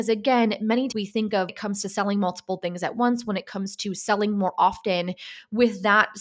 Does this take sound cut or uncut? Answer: cut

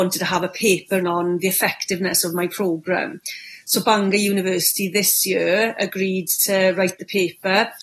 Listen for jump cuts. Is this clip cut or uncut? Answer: cut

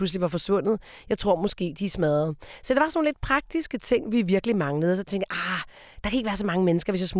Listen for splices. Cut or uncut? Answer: uncut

